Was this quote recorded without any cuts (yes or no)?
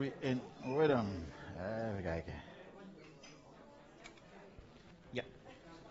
yes